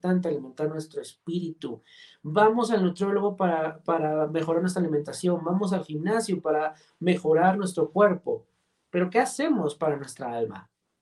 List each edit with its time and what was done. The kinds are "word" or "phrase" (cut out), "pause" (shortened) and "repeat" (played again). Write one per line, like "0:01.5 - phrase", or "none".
none